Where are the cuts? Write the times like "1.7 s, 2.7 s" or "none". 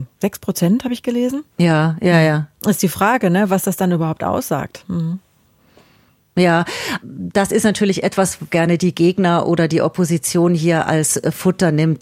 1.5 s, 7.0 s, 8.5 s